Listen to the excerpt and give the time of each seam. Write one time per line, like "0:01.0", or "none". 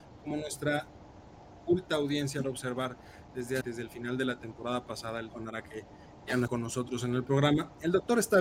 0:02.4
0:03.6
0:05.3
0:06.5